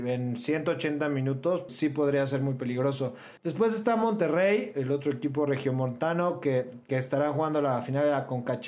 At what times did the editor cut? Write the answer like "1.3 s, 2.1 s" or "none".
1.7 s, 3.4 s